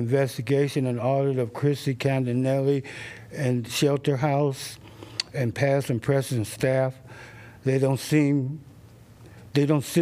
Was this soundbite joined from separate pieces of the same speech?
no; 0 cuts

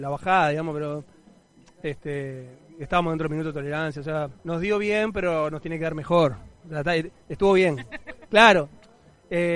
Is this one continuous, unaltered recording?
no; 1 cut; at 4.4 s

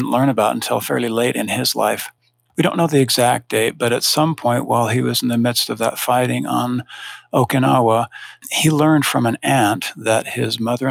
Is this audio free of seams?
yes; 0 cuts

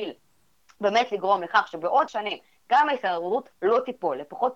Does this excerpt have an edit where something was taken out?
yes; 1 cut; at 2.1 s

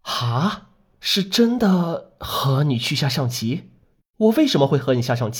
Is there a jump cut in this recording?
no; 0 cuts

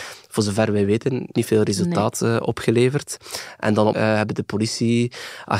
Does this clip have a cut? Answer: yes; 2 cuts; at 1.3 s, 3.9 s

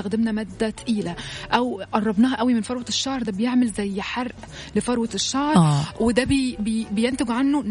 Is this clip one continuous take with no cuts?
yes; 0 cuts

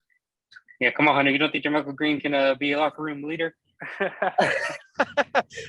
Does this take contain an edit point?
no; 0 cuts

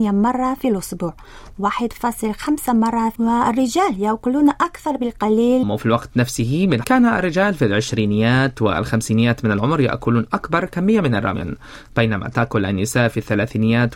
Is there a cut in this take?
yes; 4 cuts; at 1.5 s, 3.2 s, 5.6 s, 6.8 s

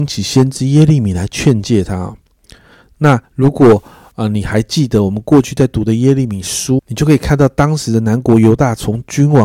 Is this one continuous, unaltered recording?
no; 2 cuts; at 3.2 s, 6.8 s

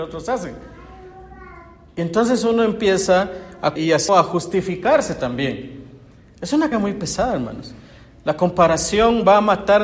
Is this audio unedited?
no; 3 cuts; at 3.8 s, 4.1 s, 6.7 s

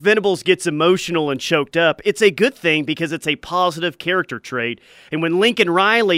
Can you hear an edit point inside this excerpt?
no; 0 cuts

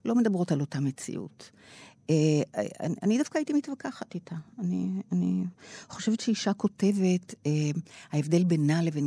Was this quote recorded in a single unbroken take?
yes; 0 cuts

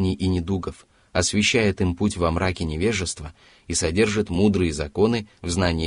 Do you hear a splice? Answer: no; 0 cuts

